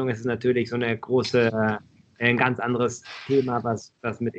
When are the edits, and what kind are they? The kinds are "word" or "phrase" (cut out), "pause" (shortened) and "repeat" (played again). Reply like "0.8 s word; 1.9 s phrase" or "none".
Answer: none